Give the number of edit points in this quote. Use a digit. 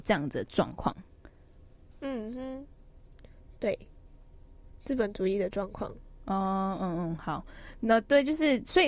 0